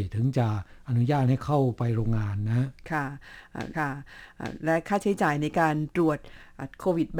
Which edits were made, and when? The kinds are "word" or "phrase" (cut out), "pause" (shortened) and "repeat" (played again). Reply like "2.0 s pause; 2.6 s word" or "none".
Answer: 3.7 s repeat